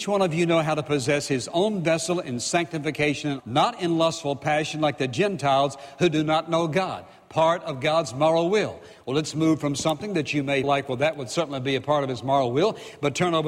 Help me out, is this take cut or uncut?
cut